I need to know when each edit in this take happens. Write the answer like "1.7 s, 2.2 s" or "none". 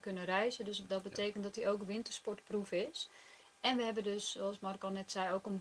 none